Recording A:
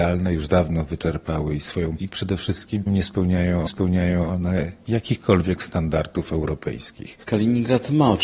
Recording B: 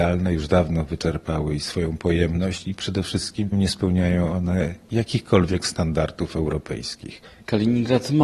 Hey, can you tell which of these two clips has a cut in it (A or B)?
A